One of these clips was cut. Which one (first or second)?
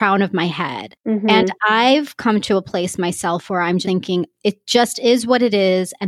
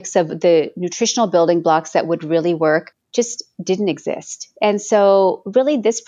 first